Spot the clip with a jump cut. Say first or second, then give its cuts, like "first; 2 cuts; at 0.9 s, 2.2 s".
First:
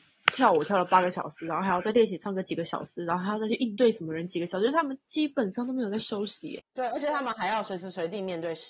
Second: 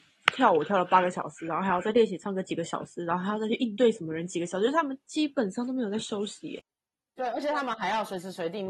first; 1 cut; at 6.7 s